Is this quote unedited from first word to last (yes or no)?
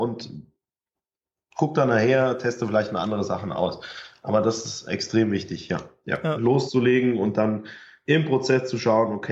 yes